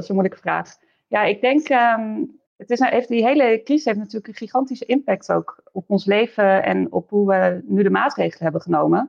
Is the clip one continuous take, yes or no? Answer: no